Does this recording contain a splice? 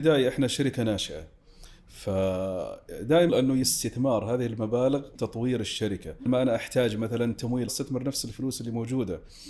yes; 5 cuts; at 3.3 s, 3.6 s, 5.2 s, 6.3 s, 7.7 s

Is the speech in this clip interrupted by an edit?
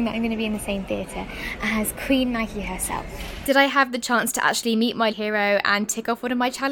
yes; 1 cut; at 5.1 s

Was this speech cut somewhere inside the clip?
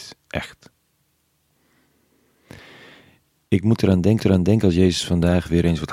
yes; 1 cut; at 4.2 s

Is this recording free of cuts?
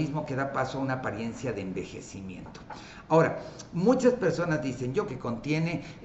no; 1 cut; at 5.1 s

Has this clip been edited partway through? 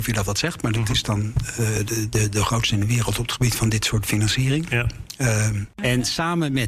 no; 0 cuts

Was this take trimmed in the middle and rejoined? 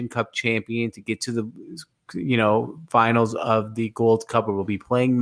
no; 0 cuts

